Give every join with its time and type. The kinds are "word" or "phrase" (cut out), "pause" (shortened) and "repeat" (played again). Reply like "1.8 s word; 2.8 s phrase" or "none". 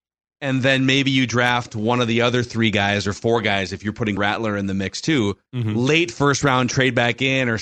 4.2 s word; 5.5 s pause